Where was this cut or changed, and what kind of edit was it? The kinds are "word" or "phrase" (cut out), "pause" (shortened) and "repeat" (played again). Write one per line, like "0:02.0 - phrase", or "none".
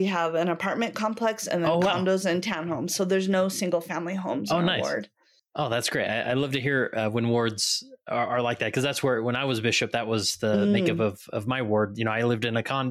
none